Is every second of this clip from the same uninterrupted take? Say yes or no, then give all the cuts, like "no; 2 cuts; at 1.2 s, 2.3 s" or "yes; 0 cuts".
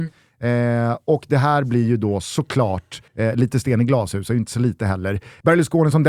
no; 1 cut; at 3.1 s